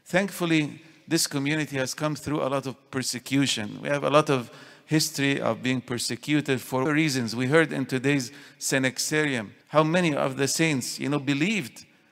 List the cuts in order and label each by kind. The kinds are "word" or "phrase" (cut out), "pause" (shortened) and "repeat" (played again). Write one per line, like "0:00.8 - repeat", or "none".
0:06.9 - word
0:09.6 - pause